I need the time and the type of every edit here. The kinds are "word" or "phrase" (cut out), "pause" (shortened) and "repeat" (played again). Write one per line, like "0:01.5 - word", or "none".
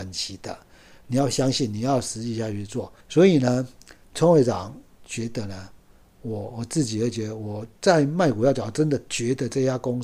0:03.0 - pause
0:04.0 - word
0:07.8 - pause